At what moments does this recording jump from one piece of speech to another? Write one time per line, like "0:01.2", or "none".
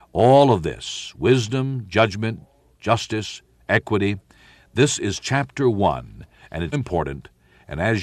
0:06.7